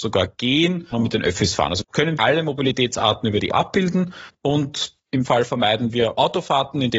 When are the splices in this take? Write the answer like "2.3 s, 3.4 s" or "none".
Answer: 0.9 s, 1.8 s, 2.2 s, 3.5 s, 5.2 s